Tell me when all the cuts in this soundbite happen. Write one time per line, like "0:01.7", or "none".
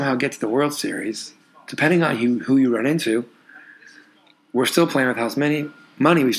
none